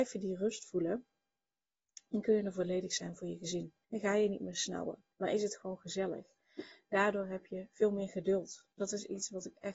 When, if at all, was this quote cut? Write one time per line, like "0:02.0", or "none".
0:03.8
0:05.1
0:08.7